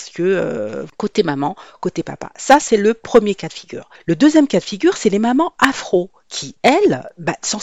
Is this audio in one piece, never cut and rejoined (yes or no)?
yes